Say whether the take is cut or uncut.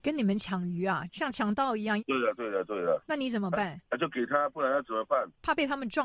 uncut